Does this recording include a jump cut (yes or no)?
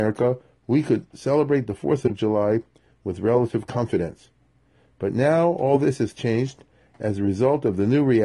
no